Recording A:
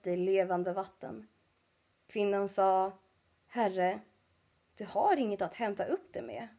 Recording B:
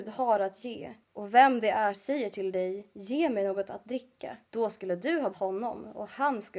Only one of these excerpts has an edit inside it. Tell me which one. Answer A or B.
B